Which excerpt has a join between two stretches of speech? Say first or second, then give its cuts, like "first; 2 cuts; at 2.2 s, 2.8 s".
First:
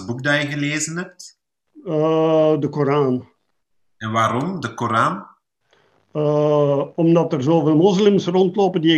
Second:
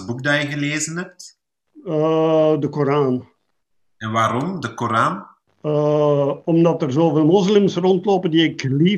second; 1 cut; at 5.5 s